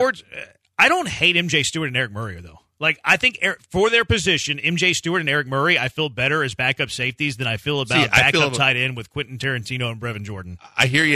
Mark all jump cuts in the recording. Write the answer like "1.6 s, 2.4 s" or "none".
none